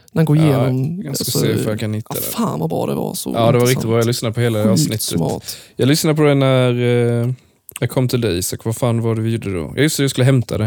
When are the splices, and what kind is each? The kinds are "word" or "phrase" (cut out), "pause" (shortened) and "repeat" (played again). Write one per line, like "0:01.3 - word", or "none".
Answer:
none